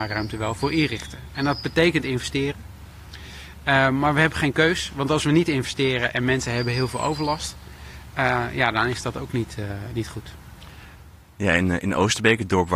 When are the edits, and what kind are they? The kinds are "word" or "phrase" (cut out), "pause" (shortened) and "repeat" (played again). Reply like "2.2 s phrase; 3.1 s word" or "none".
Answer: none